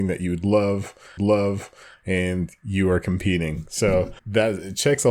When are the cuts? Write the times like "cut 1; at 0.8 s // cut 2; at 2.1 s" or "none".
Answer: cut 1; at 1.2 s // cut 2; at 4.2 s